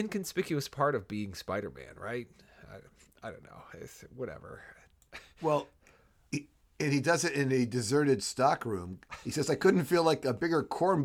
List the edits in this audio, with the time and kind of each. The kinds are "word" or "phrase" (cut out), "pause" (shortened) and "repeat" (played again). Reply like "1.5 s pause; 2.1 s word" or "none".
none